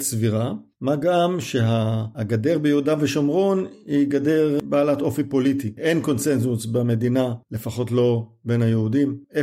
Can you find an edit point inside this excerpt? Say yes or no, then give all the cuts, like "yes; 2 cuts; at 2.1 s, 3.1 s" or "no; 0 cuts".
no; 0 cuts